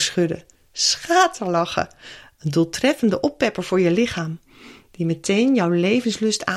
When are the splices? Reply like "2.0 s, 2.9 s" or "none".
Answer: none